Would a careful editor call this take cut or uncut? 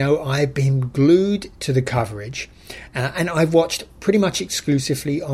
uncut